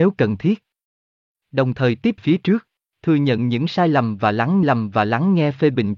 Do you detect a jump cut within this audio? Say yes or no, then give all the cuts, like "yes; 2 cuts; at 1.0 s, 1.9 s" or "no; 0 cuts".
yes; 3 cuts; at 2.2 s, 2.9 s, 4.6 s